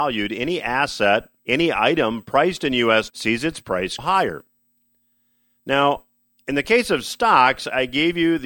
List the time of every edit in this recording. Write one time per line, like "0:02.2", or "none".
0:01.4
0:03.1
0:04.0